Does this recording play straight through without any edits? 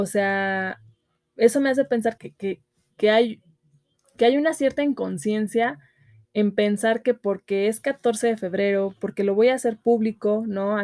no; 1 cut; at 2.2 s

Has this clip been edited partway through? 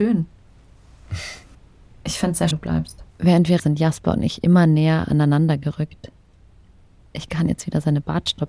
yes; 4 cuts; at 1.5 s, 2.5 s, 3.1 s, 3.6 s

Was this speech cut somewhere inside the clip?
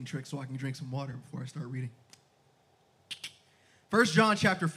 no; 0 cuts

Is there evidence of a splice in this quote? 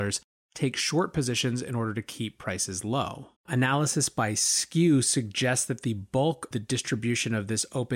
yes; 2 cuts; at 3.4 s, 6.5 s

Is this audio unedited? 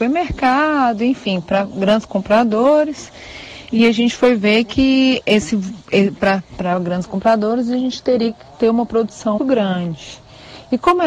no; 2 cuts; at 6.2 s, 9.4 s

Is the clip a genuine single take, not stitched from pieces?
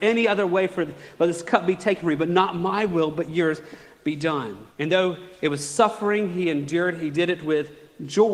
no; 1 cut; at 4.7 s

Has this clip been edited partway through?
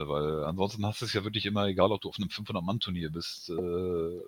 no; 0 cuts

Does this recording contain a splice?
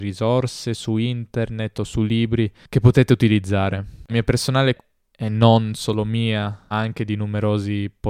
yes; 3 cuts; at 4.1 s, 4.8 s, 6.7 s

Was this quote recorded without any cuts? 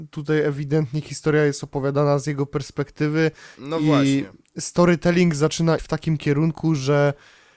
no; 3 cuts; at 1.0 s, 3.5 s, 5.8 s

